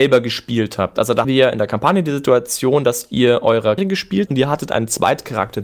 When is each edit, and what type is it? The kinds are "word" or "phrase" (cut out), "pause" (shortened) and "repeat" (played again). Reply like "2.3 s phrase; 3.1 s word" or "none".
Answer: 1.2 s word; 3.8 s word; 4.3 s word